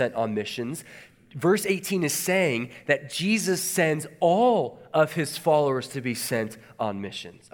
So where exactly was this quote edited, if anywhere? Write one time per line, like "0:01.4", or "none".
none